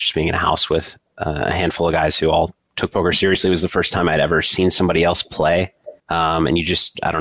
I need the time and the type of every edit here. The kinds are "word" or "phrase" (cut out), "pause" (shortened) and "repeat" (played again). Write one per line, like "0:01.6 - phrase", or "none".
0:02.6 - pause
0:06.0 - pause